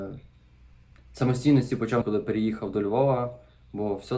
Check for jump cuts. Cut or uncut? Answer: cut